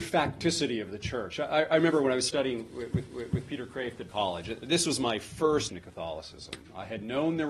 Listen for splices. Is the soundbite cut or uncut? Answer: cut